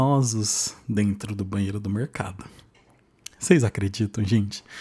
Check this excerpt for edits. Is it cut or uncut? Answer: uncut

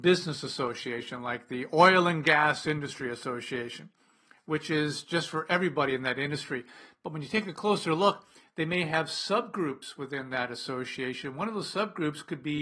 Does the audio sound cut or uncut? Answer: uncut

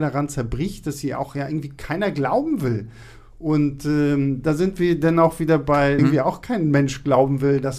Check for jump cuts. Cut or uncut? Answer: cut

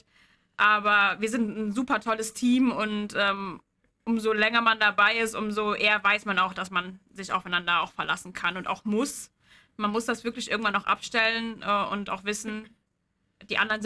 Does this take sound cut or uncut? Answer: uncut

